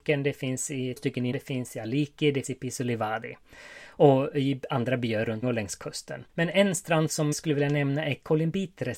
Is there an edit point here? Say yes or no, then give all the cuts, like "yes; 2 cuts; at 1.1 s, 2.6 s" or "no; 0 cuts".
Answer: yes; 6 cuts; at 1.0 s, 1.3 s, 2.4 s, 5.4 s, 6.3 s, 7.3 s